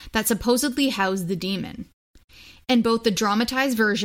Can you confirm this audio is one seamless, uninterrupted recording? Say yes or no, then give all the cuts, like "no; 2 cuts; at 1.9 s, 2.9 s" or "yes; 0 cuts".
yes; 0 cuts